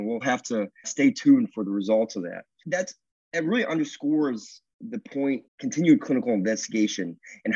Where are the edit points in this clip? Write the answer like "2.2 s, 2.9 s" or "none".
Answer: 5.5 s